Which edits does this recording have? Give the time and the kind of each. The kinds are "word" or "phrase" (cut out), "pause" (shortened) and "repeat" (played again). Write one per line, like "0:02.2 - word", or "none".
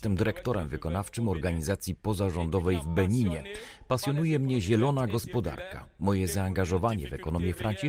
none